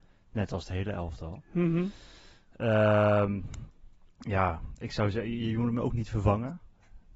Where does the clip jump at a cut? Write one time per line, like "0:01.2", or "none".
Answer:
none